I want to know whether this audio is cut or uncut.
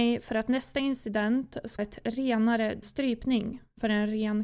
cut